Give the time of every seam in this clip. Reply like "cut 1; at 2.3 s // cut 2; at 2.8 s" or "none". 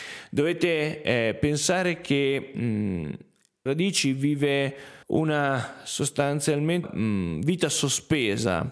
cut 1; at 3.7 s // cut 2; at 5.0 s // cut 3; at 6.8 s